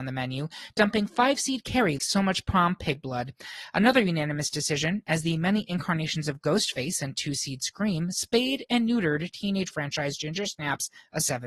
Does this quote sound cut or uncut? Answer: cut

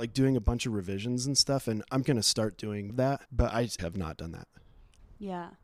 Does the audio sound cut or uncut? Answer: cut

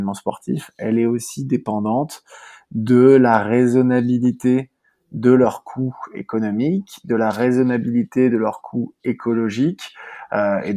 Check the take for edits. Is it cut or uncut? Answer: uncut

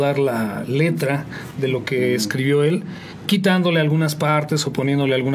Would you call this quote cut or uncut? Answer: uncut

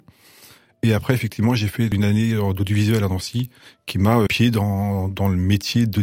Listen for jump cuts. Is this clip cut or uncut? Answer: cut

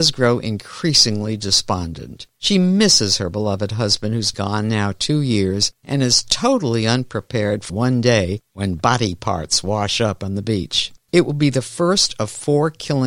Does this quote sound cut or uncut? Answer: cut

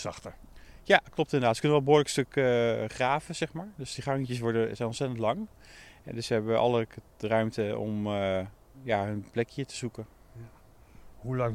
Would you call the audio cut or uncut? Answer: uncut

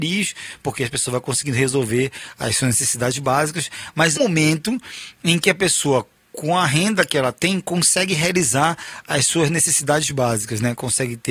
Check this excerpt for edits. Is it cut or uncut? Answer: cut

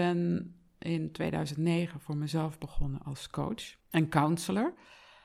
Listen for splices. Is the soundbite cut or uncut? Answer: cut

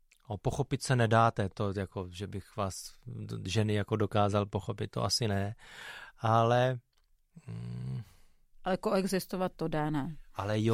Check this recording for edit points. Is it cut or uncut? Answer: uncut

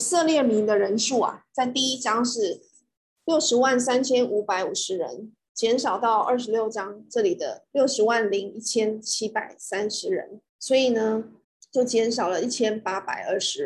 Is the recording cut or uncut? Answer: cut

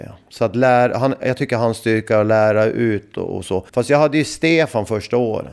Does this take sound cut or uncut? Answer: cut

